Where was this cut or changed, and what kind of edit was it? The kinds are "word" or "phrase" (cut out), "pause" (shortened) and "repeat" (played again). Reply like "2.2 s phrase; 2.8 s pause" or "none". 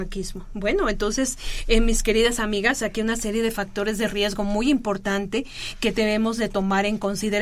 none